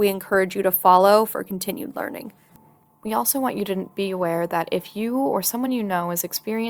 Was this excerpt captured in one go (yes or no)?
yes